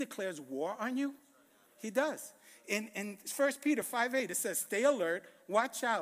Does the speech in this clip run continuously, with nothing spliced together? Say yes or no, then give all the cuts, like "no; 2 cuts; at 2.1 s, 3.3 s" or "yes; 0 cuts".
yes; 0 cuts